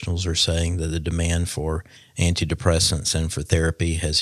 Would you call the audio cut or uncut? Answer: cut